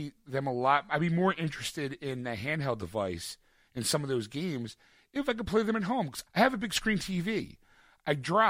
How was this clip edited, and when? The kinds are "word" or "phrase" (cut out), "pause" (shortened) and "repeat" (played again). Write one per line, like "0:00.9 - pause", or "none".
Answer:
0:06.3 - word